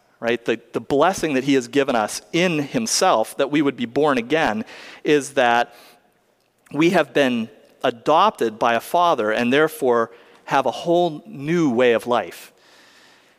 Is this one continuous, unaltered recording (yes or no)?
yes